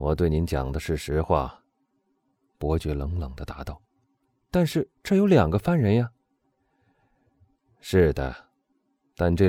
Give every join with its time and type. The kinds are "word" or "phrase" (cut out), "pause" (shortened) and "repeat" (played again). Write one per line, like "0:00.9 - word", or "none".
0:03.8 - pause
0:05.0 - pause